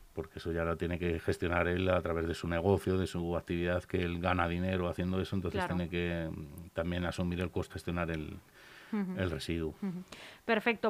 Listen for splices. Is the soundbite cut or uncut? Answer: cut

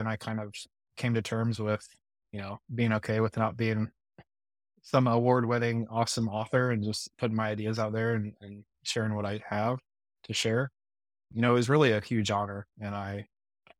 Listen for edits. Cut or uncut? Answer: uncut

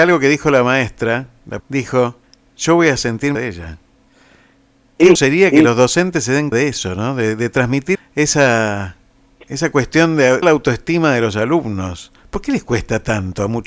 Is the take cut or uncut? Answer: cut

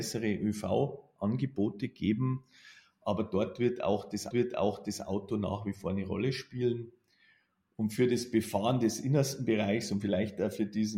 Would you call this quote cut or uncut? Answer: cut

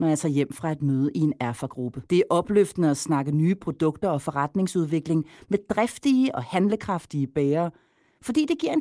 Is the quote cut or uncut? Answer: cut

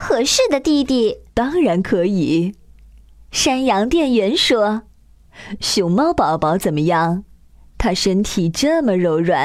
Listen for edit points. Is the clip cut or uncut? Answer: cut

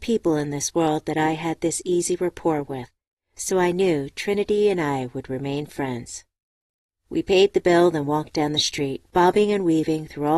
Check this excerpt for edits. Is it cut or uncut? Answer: uncut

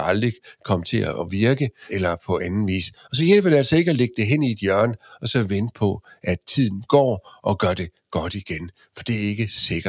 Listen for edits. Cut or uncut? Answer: uncut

